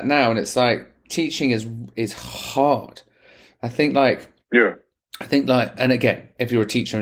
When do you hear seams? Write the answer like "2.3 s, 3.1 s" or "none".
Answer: none